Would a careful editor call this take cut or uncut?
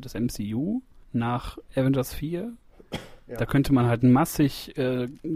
cut